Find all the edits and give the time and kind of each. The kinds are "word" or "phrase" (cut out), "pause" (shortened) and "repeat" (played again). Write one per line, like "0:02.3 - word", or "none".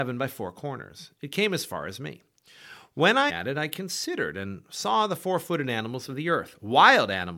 0:03.3 - phrase